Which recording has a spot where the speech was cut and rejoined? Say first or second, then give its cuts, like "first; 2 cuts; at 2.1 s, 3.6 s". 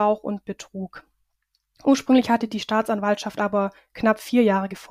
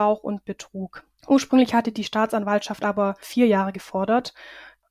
second; 2 cuts; at 1.2 s, 3.2 s